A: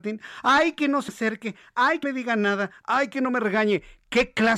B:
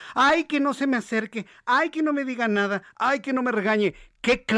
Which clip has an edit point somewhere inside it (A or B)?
A